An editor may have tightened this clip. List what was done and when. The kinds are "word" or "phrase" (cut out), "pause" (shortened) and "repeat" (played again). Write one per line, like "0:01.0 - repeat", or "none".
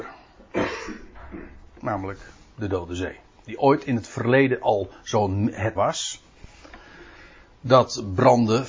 0:05.8 - word